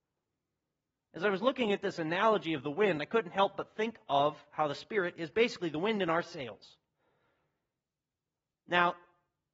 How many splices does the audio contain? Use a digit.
0